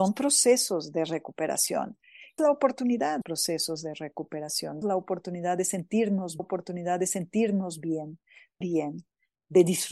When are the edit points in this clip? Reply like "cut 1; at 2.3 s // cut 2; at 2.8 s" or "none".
cut 1; at 2.4 s // cut 2; at 3.2 s // cut 3; at 4.8 s // cut 4; at 6.4 s // cut 5; at 8.6 s